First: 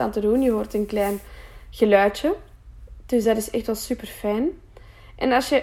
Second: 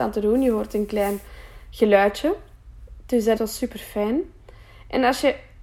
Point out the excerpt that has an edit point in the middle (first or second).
second